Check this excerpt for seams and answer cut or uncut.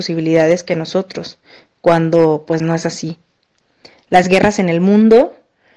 uncut